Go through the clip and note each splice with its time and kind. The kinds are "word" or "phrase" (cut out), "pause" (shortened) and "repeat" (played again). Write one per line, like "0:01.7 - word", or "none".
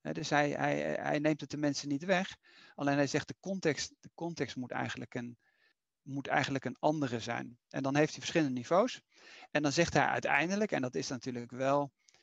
none

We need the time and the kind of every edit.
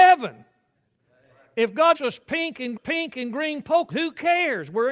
0:01.9 - word
0:02.8 - repeat
0:03.9 - word

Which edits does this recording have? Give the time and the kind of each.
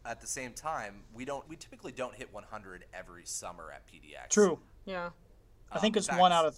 0:01.4 - word

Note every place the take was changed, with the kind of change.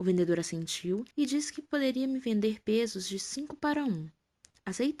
0:01.1 - pause

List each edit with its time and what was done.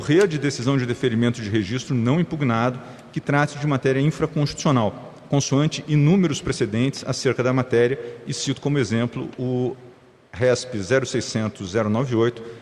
none

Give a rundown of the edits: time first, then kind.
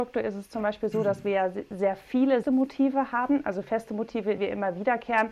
0:02.4 - phrase
0:04.4 - word

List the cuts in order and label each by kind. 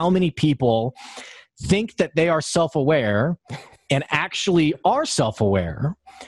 none

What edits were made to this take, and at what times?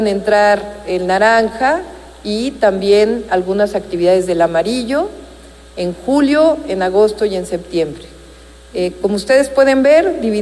none

